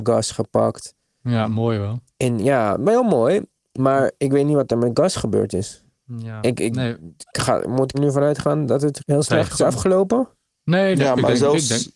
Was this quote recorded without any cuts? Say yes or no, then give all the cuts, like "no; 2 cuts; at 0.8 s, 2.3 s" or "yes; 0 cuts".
no; 3 cuts; at 4.2 s, 7.9 s, 9.0 s